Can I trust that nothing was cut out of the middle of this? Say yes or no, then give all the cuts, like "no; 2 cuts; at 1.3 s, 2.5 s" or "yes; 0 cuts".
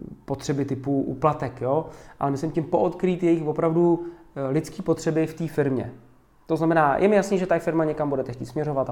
yes; 0 cuts